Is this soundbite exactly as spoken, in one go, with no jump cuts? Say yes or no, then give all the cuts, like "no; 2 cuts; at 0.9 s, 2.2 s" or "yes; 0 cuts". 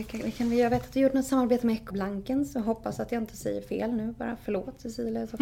no; 1 cut; at 1.9 s